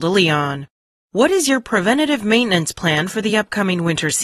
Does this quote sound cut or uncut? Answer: uncut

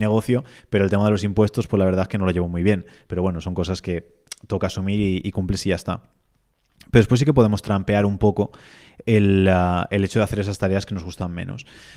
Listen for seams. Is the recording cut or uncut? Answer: uncut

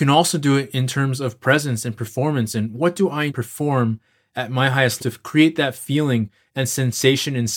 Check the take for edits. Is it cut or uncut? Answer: cut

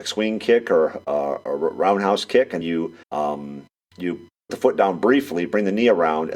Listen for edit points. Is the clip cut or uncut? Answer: cut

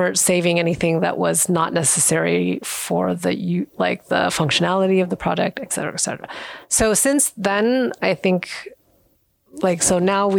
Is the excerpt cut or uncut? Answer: uncut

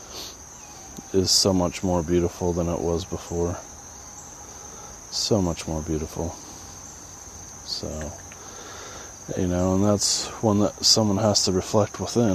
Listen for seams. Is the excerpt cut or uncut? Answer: uncut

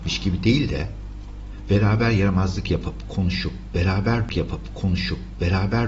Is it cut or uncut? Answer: cut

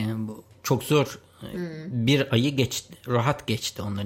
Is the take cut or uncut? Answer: uncut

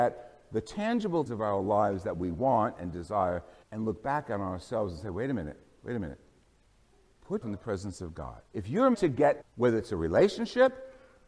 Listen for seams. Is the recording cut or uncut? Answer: cut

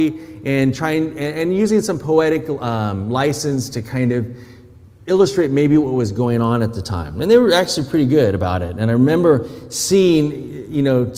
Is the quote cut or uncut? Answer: uncut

